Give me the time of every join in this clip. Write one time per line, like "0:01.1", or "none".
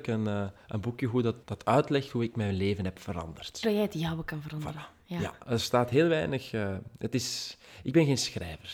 0:01.4
0:03.6